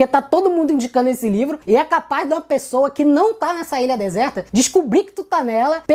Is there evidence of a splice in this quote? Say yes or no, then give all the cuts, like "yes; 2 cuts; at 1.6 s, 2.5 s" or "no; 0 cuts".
no; 0 cuts